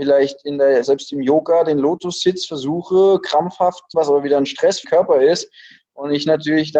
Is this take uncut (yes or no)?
no